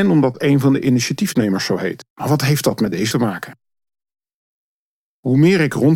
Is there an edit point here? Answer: yes; 2 cuts; at 2.1 s, 3.1 s

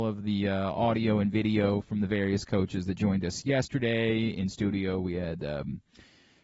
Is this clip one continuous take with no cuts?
yes; 0 cuts

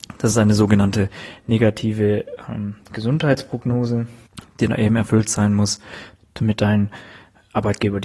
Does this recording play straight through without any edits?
yes; 0 cuts

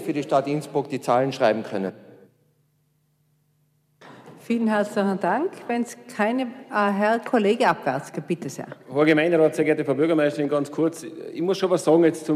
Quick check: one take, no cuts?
no; 1 cut; at 8.8 s

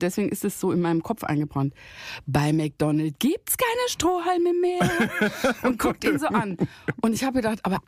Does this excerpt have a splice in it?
no; 0 cuts

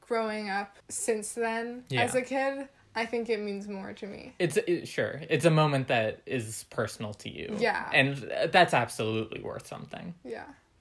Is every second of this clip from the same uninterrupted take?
yes; 0 cuts

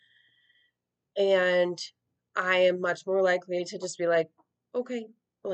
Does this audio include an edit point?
no; 0 cuts

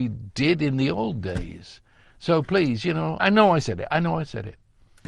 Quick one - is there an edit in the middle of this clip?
yes; 1 cut; at 3.2 s

